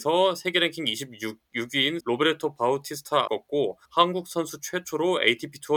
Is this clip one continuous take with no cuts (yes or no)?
no